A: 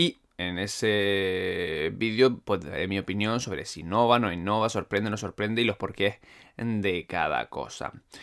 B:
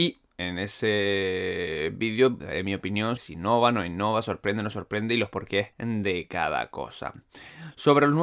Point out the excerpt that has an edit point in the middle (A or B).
B